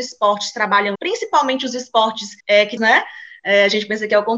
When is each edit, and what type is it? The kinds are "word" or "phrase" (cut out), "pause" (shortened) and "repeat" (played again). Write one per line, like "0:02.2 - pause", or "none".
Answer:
0:00.9 - word
0:02.4 - pause
0:02.8 - phrase